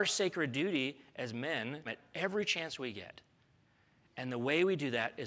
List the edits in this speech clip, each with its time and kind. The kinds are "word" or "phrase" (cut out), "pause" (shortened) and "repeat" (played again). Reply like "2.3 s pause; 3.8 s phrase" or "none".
1.8 s phrase